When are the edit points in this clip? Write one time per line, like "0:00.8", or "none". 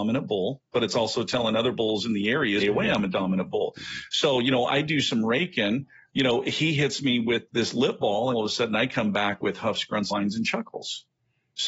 0:02.6
0:07.5
0:08.3
0:10.1